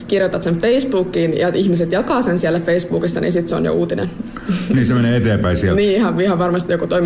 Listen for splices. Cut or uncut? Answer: uncut